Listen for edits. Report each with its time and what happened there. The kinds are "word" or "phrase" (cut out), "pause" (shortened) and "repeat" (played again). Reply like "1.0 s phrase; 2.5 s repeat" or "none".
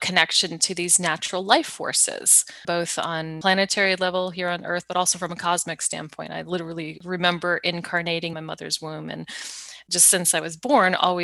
8.3 s phrase